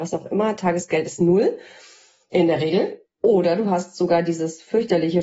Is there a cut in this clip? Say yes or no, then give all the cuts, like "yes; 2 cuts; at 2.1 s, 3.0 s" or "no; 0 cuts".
no; 0 cuts